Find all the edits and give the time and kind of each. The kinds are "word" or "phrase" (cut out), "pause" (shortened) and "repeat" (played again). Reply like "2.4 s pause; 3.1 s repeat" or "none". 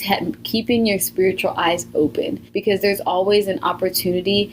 2.5 s pause

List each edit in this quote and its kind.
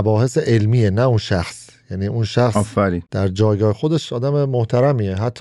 3.1 s pause

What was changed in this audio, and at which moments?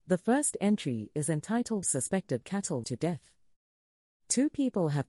1.8 s phrase; 2.8 s word

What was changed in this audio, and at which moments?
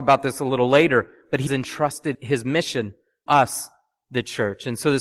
1.5 s word; 2.1 s word; 3.3 s word

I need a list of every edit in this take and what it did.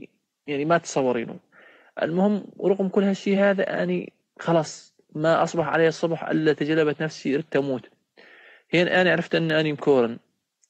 none

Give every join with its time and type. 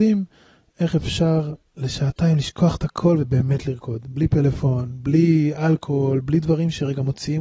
none

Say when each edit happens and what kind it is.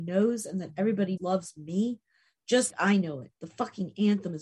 1.2 s word; 2.7 s word; 3.3 s pause

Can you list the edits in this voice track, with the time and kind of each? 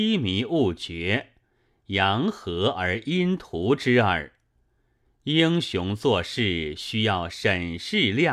none

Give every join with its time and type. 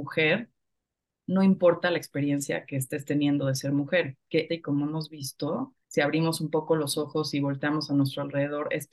4.5 s word; 5.8 s pause

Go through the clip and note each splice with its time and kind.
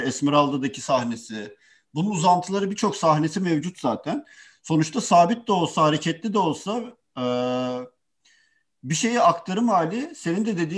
none

